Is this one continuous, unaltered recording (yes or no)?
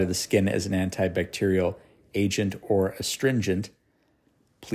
yes